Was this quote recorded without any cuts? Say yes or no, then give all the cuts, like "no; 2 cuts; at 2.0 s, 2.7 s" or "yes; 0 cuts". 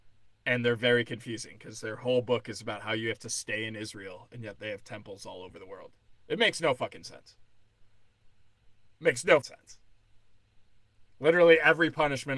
no; 1 cut; at 9.4 s